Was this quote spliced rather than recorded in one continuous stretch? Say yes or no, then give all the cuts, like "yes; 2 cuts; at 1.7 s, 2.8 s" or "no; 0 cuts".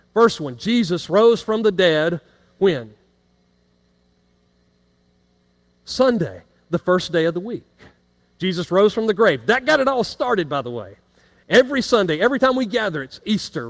no; 0 cuts